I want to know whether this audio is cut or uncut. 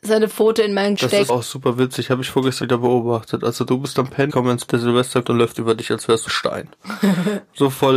cut